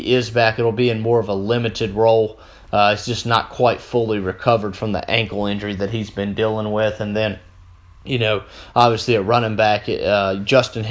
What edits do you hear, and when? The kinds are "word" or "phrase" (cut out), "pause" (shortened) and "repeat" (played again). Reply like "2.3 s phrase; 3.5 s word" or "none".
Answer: none